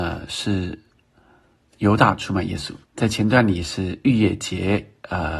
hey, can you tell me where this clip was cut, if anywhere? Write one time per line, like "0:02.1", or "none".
0:02.8